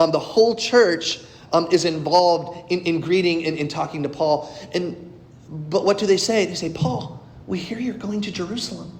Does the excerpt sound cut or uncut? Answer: uncut